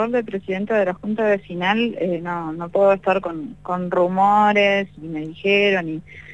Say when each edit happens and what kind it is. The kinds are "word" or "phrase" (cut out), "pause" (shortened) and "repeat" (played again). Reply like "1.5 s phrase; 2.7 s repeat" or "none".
none